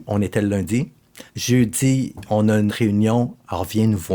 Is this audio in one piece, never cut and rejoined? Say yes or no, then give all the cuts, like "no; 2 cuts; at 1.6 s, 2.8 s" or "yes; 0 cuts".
no; 2 cuts; at 1.3 s, 2.7 s